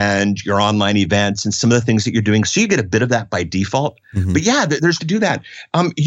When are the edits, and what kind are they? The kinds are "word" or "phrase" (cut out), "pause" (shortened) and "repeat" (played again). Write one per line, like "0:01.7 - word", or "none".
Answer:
0:05.0 - word